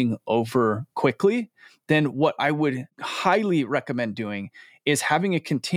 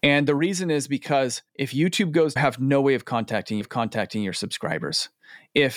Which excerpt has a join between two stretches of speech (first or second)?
second